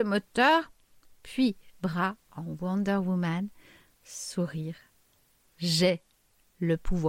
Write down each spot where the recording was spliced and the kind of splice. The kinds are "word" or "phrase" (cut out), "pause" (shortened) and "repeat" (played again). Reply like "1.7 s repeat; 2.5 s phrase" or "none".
none